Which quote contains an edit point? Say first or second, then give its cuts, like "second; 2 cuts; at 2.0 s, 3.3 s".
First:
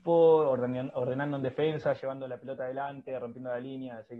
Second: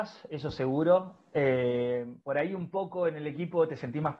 second; 1 cut; at 2.2 s